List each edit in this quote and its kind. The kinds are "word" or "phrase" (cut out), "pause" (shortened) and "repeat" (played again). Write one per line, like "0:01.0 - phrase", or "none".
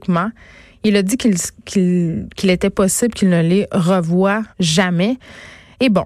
0:04.5 - pause